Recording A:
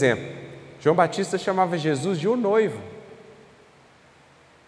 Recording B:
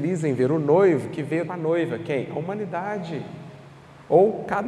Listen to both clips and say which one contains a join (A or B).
B